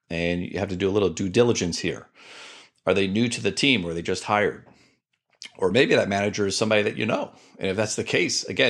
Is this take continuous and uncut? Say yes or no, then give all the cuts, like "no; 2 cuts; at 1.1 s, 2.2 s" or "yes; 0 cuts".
yes; 0 cuts